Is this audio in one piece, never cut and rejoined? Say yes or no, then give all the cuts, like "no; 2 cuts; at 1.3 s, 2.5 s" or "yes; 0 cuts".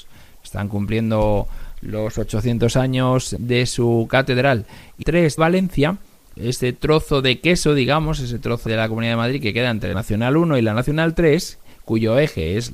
no; 6 cuts; at 3.4 s, 5.0 s, 5.4 s, 6.4 s, 8.7 s, 9.9 s